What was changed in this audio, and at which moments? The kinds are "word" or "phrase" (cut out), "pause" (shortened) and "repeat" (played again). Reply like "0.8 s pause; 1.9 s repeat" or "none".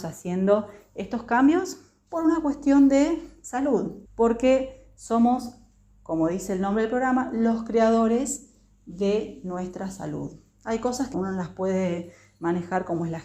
4.1 s pause; 11.1 s word